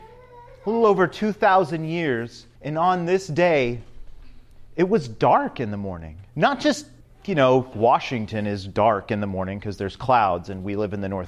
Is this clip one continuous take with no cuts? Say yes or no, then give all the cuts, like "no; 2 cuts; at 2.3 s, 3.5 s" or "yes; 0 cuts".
no; 4 cuts; at 2.6 s, 6.3 s, 7.0 s, 7.7 s